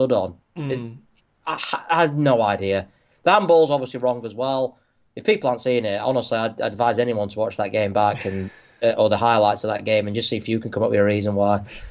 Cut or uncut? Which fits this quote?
uncut